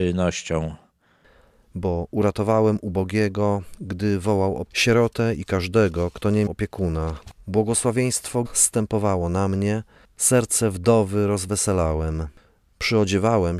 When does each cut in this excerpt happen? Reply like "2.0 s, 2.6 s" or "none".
4.7 s, 6.5 s, 8.4 s